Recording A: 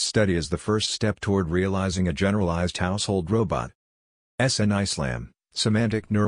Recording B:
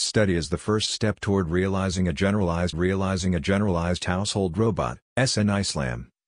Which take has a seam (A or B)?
B